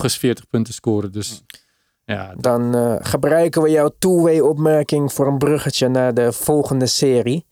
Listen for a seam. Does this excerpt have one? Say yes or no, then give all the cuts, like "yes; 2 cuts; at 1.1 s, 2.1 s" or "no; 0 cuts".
no; 0 cuts